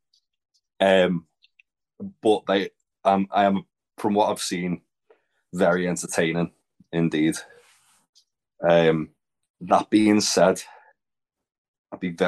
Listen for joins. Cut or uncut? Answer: uncut